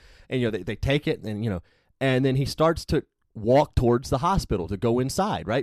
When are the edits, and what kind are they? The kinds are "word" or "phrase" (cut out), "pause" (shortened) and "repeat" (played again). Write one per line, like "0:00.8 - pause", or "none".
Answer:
0:03.2 - pause